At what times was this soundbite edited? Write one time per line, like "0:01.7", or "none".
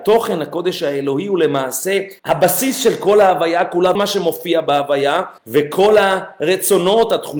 0:02.2
0:03.9
0:05.4